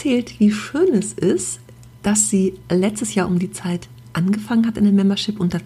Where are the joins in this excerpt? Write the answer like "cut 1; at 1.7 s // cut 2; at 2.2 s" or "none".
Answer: none